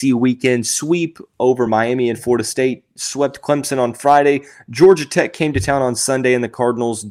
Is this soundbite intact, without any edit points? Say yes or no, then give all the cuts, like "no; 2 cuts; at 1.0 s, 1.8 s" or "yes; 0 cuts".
yes; 0 cuts